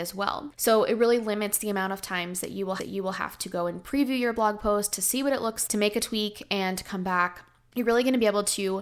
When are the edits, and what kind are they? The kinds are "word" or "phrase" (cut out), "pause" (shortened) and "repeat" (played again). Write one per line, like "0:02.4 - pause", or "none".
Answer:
0:02.8 - repeat
0:05.7 - word